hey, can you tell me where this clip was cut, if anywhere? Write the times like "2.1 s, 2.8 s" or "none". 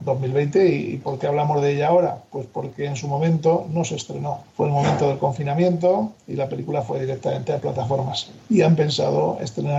4.5 s, 8.4 s